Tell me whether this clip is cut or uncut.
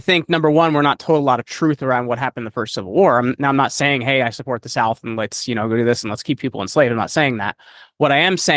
uncut